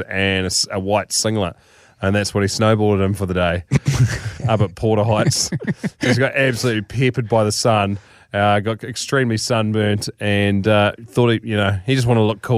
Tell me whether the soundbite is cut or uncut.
uncut